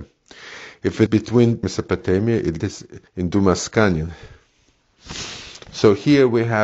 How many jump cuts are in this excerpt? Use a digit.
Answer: 4